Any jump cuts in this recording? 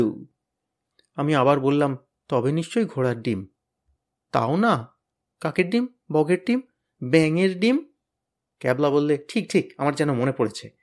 no; 0 cuts

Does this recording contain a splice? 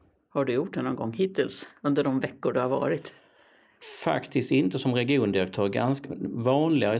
no; 0 cuts

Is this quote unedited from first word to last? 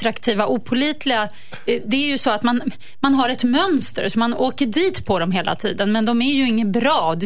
yes; 0 cuts

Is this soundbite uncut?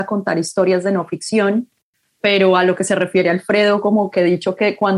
yes; 0 cuts

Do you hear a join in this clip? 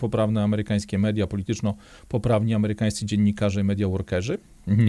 no; 0 cuts

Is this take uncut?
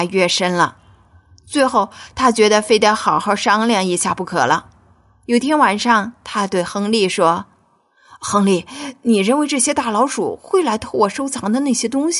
yes; 0 cuts

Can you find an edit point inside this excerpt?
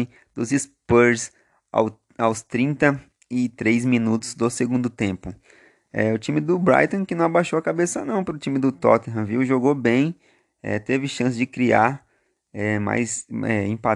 no; 0 cuts

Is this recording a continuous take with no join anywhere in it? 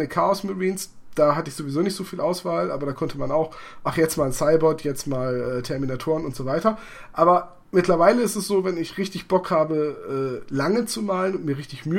no; 1 cut; at 7.6 s

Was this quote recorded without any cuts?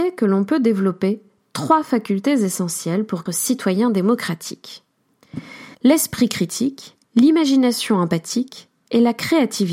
no; 3 cuts; at 3.3 s, 5.7 s, 7.0 s

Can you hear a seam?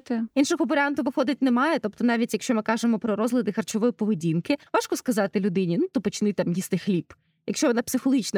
yes; 2 cuts; at 4.7 s, 5.9 s

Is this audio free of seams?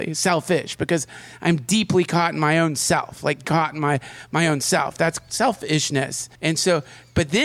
no; 2 cuts; at 3.4 s, 6.4 s

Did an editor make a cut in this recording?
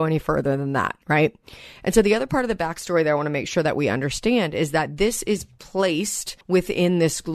yes; 2 cuts; at 1.0 s, 6.4 s

